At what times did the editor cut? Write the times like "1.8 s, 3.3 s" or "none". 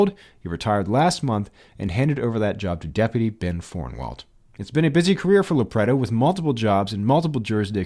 none